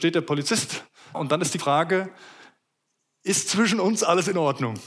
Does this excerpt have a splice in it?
yes; 2 cuts; at 1.1 s, 1.6 s

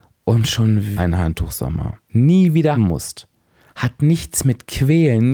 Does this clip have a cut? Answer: yes; 3 cuts; at 1.0 s, 2.1 s, 2.7 s

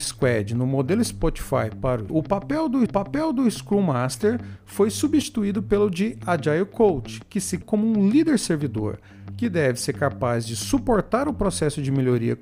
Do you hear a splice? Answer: yes; 3 cuts; at 2.1 s, 2.9 s, 7.6 s

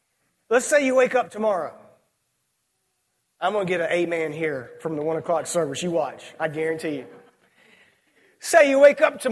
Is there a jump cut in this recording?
no; 0 cuts

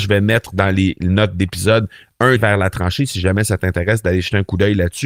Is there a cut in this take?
yes; 1 cut; at 2.4 s

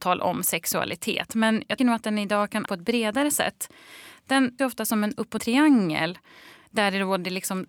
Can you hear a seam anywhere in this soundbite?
yes; 4 cuts; at 1.8 s, 2.7 s, 4.6 s, 5.4 s

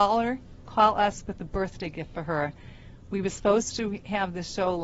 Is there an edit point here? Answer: no; 0 cuts

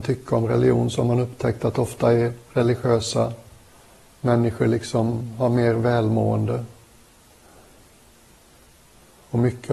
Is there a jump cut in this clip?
no; 0 cuts

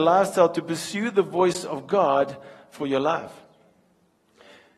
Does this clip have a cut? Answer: no; 0 cuts

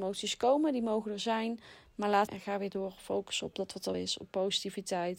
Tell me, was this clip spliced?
yes; 2 cuts; at 2.3 s, 3.9 s

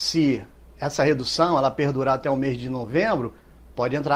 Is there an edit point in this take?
no; 0 cuts

